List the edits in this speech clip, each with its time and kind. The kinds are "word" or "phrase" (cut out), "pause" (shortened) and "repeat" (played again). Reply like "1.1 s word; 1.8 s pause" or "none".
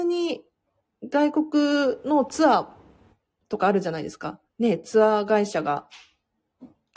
4.5 s pause